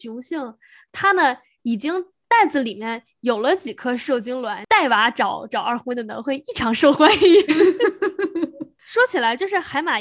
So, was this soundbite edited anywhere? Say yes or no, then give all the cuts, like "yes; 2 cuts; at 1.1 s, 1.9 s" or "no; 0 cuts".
no; 0 cuts